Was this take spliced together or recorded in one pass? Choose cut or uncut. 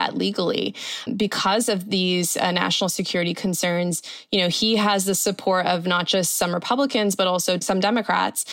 cut